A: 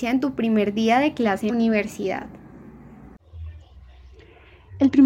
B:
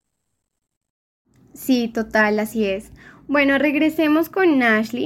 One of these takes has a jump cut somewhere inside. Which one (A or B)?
A